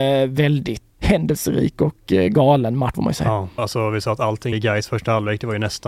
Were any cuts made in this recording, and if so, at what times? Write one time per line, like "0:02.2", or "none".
0:01.0
0:02.9
0:03.6
0:04.5

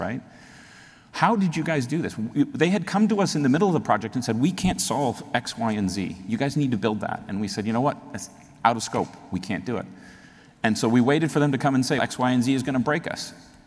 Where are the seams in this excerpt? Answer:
0:12.0

